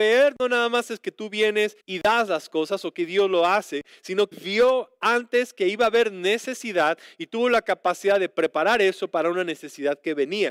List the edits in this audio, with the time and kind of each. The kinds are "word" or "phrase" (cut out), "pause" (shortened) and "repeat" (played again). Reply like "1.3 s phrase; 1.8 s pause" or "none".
1.8 s pause; 4.3 s word

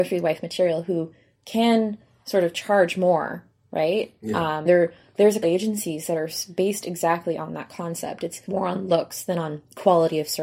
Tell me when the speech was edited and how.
4.7 s word; 5.4 s word; 8.5 s word

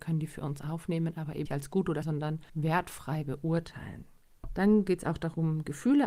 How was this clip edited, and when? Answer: 1.5 s word; 2.0 s phrase

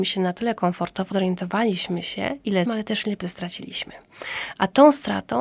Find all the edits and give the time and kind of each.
1.1 s word; 2.7 s word; 3.2 s word

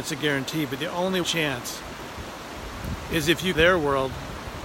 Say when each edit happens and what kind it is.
1.2 s phrase; 3.5 s phrase

